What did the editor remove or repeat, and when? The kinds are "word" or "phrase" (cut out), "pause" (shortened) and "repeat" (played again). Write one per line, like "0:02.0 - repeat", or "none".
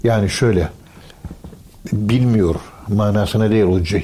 none